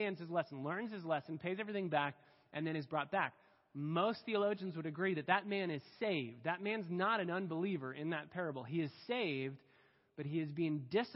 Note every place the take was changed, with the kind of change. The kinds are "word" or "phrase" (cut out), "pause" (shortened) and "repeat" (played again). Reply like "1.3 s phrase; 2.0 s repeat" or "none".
none